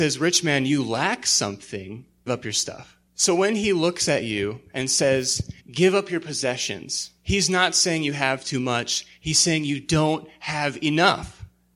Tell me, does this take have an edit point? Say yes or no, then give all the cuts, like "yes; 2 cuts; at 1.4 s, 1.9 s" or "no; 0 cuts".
yes; 4 cuts; at 2.3 s, 3.1 s, 5.6 s, 7.2 s